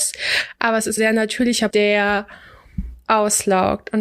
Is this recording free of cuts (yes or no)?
no